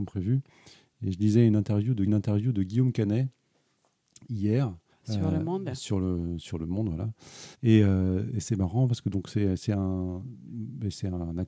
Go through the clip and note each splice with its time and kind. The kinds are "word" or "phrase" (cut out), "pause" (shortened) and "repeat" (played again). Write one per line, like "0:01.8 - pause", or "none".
0:02.1 - repeat
0:04.9 - pause
0:07.5 - pause